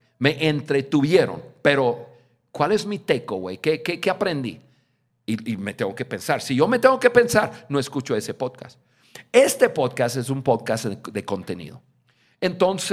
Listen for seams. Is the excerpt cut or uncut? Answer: uncut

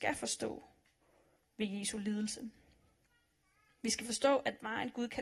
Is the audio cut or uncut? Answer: uncut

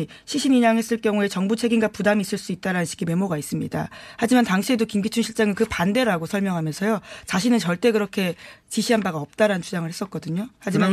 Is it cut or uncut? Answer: uncut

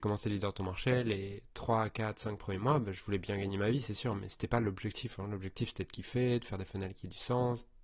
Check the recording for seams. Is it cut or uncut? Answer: uncut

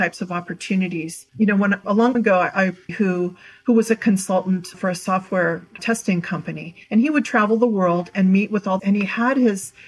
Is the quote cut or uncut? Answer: cut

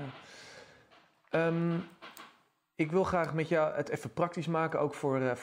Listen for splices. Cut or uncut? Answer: uncut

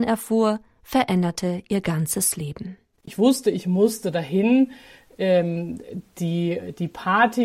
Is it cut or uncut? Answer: uncut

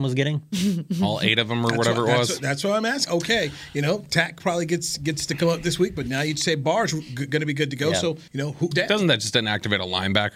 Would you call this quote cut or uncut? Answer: cut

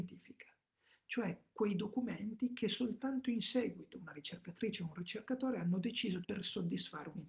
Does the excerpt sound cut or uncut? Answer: cut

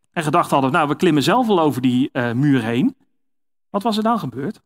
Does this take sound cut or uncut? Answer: uncut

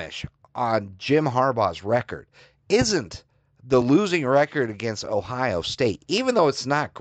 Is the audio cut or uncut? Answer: uncut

